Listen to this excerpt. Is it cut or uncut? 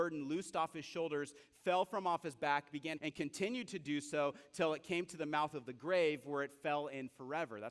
cut